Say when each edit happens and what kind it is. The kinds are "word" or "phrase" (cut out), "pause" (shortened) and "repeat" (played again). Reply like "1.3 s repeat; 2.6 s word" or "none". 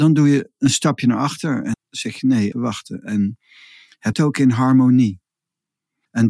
1.7 s word; 2.5 s word; 4.1 s word